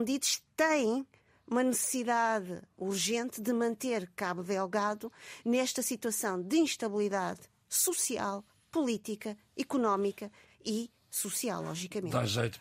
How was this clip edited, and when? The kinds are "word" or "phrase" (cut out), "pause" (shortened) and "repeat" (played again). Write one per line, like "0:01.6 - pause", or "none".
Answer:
none